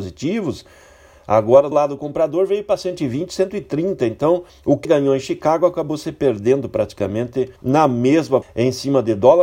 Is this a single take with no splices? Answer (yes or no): no